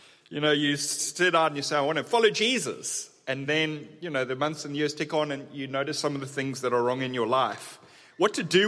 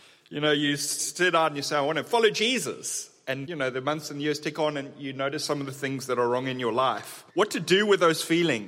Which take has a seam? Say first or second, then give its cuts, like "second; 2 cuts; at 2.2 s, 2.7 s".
second; 2 cuts; at 3.5 s, 7.3 s